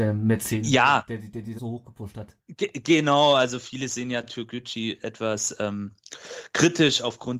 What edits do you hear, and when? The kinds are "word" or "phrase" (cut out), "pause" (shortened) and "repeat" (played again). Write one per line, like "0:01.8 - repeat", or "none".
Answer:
0:01.6 - word
0:02.4 - pause